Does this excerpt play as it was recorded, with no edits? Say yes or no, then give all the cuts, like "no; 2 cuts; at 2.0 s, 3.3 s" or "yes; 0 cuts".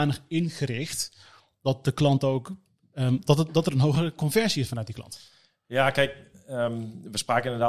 yes; 0 cuts